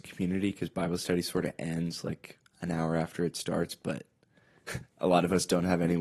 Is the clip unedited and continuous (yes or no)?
yes